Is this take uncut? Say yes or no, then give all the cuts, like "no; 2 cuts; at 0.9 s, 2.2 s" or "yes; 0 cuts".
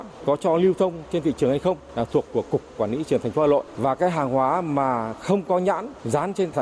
no; 1 cut; at 2.3 s